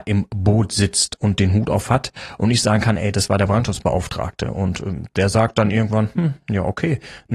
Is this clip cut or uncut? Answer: uncut